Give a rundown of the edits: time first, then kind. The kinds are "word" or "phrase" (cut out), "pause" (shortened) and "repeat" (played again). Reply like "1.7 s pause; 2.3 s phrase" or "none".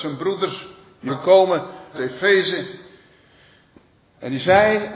1.1 s word; 1.9 s word